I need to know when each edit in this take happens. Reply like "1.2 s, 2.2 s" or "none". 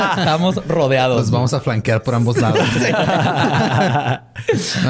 none